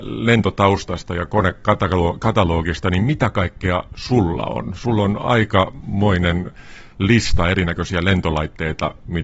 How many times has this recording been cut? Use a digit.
0